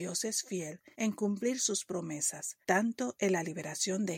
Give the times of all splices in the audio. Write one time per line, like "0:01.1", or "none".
0:00.9
0:02.6

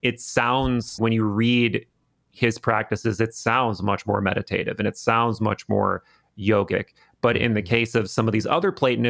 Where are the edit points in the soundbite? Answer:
0:01.0

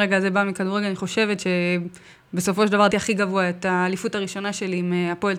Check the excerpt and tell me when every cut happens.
0:02.9

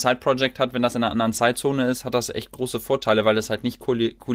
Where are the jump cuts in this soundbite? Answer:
none

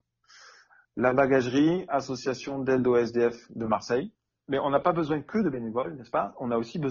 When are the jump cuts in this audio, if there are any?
none

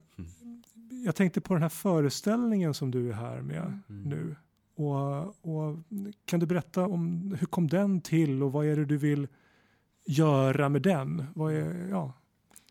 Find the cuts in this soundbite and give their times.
0:01.4
0:06.2
0:06.9

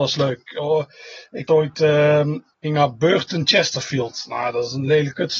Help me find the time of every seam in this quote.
0:01.5

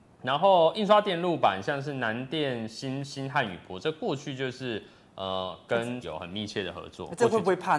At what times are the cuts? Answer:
0:06.0

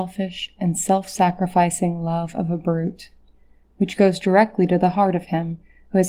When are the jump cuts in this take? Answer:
none

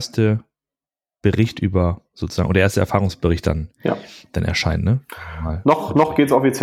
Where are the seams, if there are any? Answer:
none

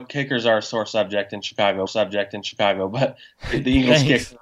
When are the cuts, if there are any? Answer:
0:01.9

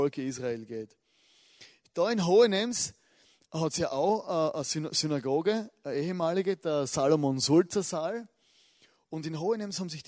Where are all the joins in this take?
none

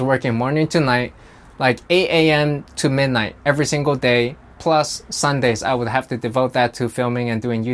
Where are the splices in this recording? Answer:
none

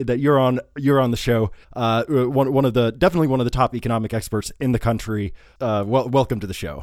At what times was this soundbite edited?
0:01.6

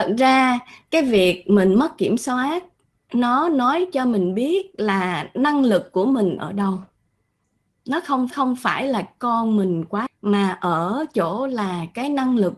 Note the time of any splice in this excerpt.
0:06.4
0:08.3
0:10.1

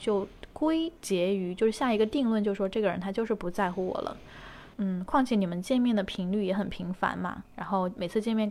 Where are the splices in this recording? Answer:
0:01.0
0:04.7

